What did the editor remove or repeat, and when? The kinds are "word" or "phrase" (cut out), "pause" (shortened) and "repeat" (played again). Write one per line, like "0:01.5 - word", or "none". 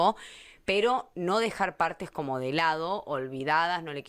none